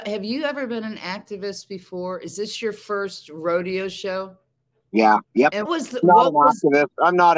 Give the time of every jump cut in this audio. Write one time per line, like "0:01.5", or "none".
0:05.2
0:05.6